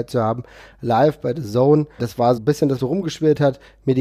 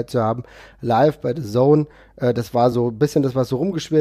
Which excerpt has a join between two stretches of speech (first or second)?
first